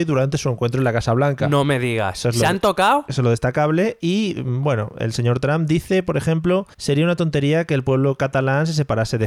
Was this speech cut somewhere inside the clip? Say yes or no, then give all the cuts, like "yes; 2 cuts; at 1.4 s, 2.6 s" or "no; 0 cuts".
yes; 1 cut; at 6.7 s